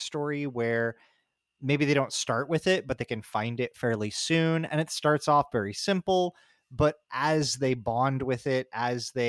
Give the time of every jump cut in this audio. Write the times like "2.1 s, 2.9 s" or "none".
none